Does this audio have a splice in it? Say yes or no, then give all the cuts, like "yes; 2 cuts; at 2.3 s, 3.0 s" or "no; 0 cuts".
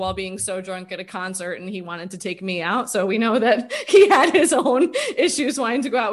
no; 0 cuts